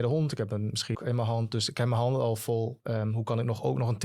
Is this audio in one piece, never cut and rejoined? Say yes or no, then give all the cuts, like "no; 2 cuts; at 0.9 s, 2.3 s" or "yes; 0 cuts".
no; 1 cut; at 0.9 s